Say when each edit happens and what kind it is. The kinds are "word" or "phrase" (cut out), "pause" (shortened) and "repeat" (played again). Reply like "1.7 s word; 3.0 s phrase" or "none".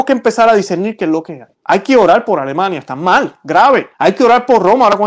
1.5 s pause; 3.9 s pause